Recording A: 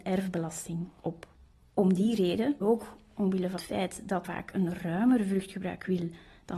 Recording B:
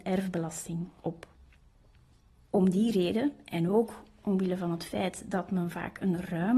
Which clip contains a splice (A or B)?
A